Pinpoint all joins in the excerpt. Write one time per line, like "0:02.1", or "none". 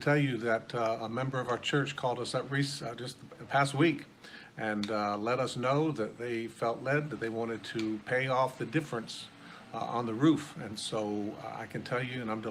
none